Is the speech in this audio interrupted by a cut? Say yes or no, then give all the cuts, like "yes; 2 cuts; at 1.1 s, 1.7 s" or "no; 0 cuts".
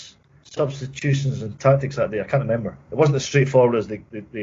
yes; 1 cut; at 2.8 s